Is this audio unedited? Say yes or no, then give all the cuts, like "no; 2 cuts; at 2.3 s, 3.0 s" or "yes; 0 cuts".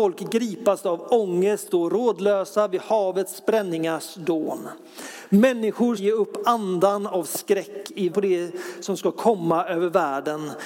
no; 3 cuts; at 1.7 s, 6.0 s, 8.1 s